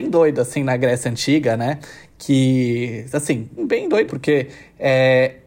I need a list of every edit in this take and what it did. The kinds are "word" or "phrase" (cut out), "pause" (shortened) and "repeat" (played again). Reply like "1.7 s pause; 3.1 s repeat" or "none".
3.6 s word; 4.1 s word